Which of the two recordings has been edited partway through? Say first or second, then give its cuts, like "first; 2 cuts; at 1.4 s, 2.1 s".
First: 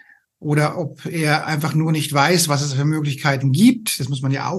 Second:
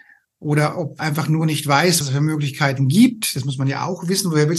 second; 2 cuts; at 1.0 s, 2.0 s